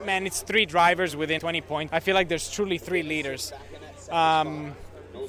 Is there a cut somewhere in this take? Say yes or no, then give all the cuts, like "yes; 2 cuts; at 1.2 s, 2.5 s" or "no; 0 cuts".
yes; 2 cuts; at 1.4 s, 1.9 s